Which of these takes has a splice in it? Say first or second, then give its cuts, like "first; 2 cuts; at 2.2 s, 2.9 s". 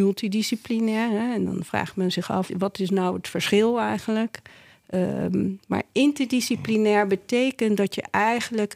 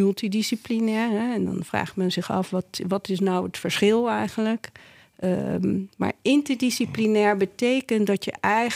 first; 1 cut; at 2.5 s